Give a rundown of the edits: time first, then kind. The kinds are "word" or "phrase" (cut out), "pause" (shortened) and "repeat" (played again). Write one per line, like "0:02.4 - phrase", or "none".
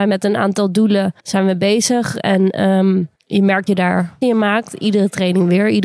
0:01.2 - pause
0:03.1 - pause
0:03.7 - word
0:04.2 - word